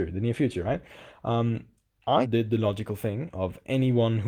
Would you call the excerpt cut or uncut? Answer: cut